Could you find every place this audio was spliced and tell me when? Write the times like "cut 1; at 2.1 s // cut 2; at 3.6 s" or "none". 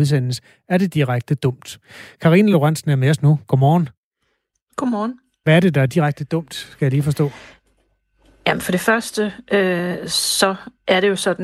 none